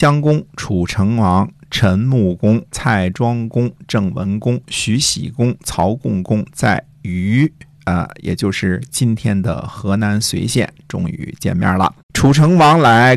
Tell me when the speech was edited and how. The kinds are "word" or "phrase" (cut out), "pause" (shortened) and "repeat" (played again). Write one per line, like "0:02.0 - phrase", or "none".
0:02.7 - pause
0:12.0 - pause